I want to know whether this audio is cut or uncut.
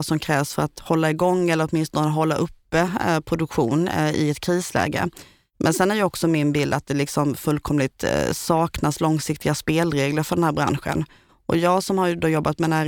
uncut